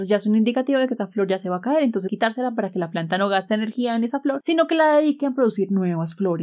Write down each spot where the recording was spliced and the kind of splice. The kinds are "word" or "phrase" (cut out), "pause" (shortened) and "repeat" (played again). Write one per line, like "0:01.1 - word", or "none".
0:02.1 - word